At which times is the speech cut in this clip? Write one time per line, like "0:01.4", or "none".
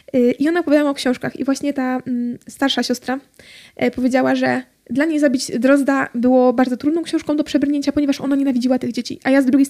none